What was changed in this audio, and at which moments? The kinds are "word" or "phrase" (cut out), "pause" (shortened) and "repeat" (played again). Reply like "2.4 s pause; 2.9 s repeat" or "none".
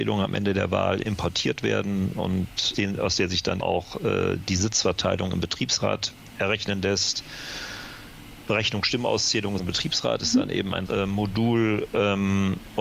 2.7 s word; 3.6 s word; 9.6 s word; 10.9 s word